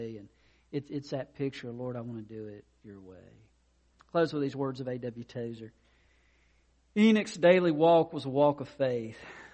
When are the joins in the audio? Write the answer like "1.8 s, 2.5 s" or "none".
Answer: none